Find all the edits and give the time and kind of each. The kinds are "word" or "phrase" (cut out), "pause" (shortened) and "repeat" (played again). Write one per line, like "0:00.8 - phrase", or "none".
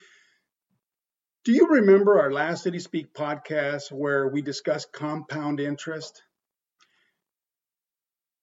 none